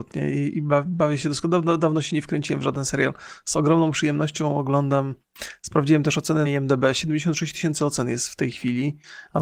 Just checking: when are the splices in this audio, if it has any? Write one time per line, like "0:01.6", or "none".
0:06.4